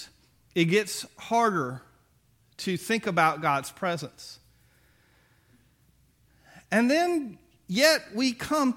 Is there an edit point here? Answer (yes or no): no